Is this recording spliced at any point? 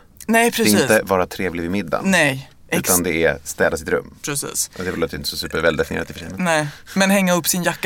no; 0 cuts

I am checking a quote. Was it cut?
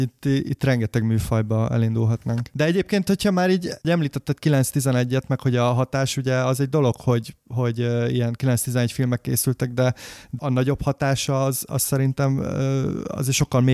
yes; 1 cut; at 10.4 s

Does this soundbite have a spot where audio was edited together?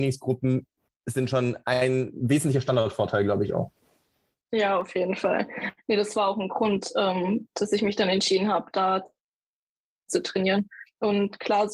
no; 0 cuts

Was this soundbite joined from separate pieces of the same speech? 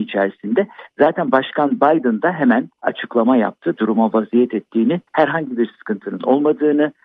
yes; 2 cuts; at 2.7 s, 5.1 s

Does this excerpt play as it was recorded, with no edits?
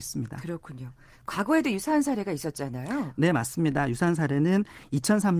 yes; 0 cuts

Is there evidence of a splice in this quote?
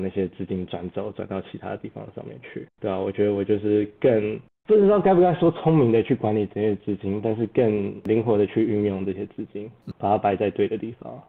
yes; 2 cuts; at 2.7 s, 9.9 s

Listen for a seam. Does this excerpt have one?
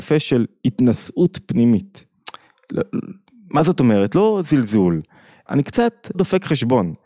yes; 2 cuts; at 5.5 s, 6.1 s

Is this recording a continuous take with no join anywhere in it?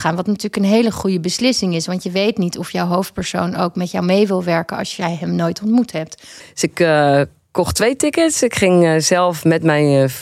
yes; 0 cuts

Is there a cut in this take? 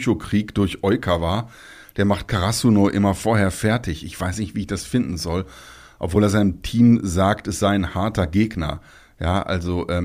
no; 0 cuts

